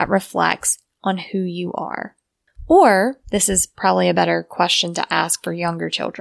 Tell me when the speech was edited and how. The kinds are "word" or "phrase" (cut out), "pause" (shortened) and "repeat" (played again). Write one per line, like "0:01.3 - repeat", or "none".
none